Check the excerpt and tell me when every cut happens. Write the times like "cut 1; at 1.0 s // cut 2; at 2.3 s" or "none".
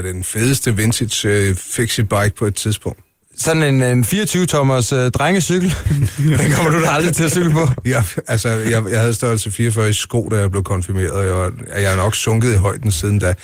none